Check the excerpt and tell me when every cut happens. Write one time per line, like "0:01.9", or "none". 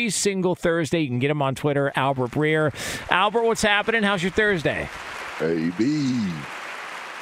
0:01.9